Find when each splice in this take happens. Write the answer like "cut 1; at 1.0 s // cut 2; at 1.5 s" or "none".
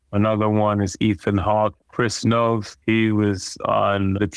cut 1; at 1.8 s // cut 2; at 2.8 s